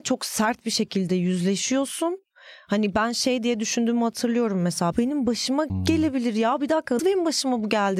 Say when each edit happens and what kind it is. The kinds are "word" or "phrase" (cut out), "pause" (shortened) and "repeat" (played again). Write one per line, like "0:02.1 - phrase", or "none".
0:04.9 - word
0:05.7 - word
0:07.0 - word